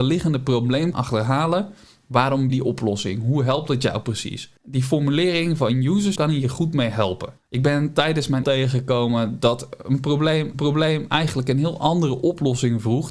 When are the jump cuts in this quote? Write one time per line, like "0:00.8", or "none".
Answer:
0:00.9
0:02.5
0:04.6
0:06.2
0:07.4
0:08.4
0:10.5

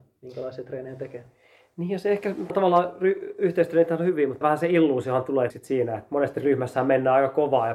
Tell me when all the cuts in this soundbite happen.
0:02.5
0:04.4
0:05.5
0:06.1

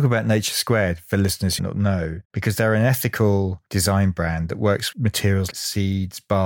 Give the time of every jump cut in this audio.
0:01.6
0:02.2
0:04.9
0:05.5

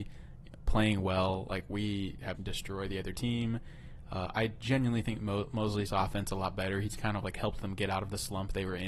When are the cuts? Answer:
0:02.4
0:05.9

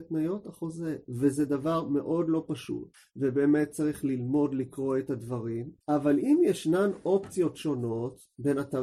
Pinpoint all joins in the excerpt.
0:02.9
0:05.8

